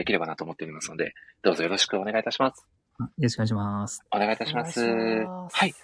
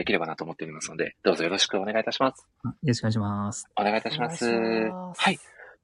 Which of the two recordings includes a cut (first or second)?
second